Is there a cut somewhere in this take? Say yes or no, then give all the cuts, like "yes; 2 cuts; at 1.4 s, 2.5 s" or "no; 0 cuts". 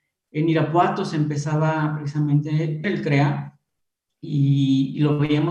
yes; 1 cut; at 2.8 s